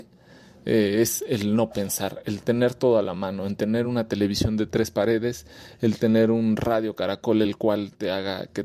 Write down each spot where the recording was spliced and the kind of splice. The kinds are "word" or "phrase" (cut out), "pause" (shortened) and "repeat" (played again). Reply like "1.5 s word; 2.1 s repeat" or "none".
none